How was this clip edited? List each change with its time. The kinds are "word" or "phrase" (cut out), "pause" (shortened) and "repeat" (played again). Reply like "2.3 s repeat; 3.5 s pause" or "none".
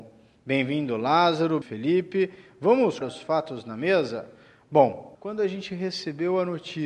1.6 s word; 3.0 s word; 5.1 s word